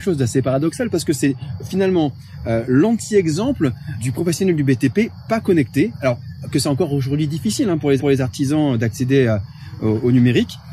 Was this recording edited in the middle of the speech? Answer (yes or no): yes